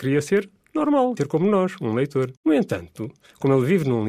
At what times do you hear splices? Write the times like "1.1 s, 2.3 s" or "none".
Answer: 1.2 s, 2.4 s